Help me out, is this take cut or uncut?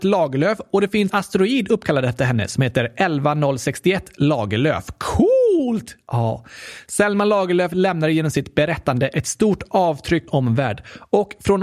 cut